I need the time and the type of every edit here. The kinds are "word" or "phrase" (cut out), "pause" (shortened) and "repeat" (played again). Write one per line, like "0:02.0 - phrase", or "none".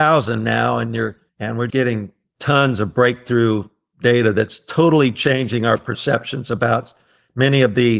0:01.3 - pause
0:01.7 - word